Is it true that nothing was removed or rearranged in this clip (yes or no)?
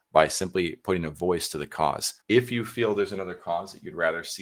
no